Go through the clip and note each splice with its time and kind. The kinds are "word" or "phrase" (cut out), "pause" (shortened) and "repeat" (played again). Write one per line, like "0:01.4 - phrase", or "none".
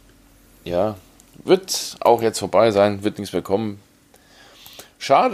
none